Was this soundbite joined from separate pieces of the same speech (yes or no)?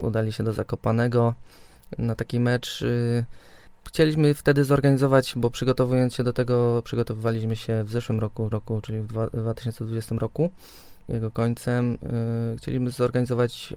yes